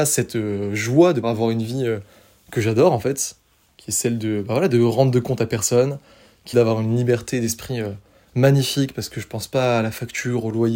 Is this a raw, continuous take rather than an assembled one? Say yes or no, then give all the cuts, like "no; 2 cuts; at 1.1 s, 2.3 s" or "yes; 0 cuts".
no; 2 cuts; at 1.2 s, 6.5 s